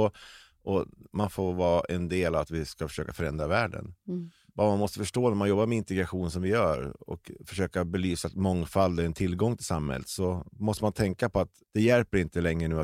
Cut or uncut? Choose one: uncut